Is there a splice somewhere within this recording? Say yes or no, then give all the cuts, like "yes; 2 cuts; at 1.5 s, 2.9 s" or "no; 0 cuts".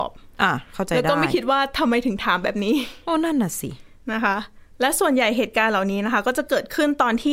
no; 0 cuts